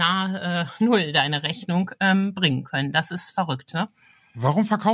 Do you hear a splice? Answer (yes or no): no